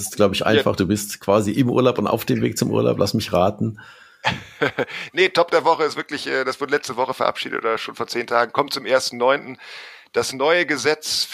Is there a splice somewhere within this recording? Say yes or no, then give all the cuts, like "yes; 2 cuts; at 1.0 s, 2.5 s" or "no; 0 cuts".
no; 0 cuts